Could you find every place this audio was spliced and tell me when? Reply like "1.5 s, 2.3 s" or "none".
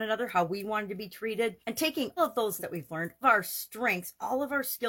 1.6 s, 2.2 s, 2.6 s, 3.2 s